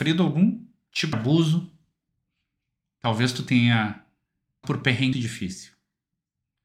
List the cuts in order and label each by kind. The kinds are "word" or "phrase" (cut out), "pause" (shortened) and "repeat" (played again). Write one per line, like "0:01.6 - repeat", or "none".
0:01.1 - word
0:04.6 - word
0:05.1 - word

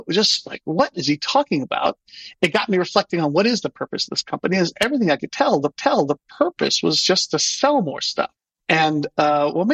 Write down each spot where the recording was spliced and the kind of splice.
0:05.8 - repeat
0:08.4 - pause

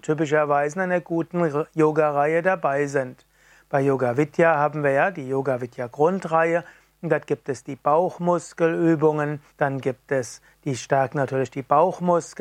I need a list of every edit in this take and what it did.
0:09.5 - pause

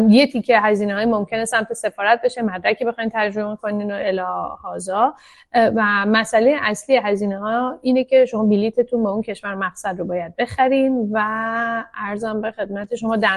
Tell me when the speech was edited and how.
none

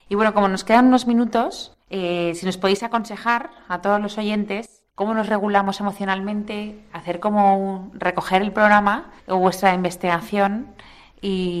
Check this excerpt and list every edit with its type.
0:01.8 - pause
0:04.9 - pause
0:09.2 - pause

